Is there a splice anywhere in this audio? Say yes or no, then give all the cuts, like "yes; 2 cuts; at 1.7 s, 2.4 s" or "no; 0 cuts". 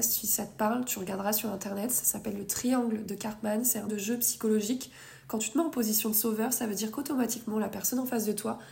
yes; 1 cut; at 3.9 s